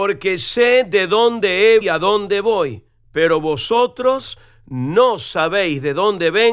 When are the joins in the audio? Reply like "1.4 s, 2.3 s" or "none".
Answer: 1.8 s